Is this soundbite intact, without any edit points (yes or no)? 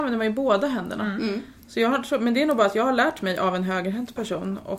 yes